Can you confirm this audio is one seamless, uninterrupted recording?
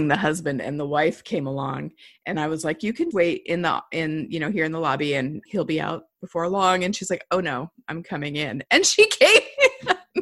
no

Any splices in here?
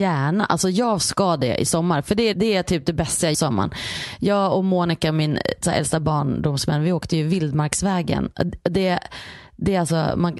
yes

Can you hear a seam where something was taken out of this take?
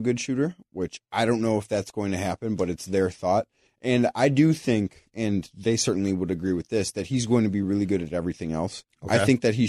no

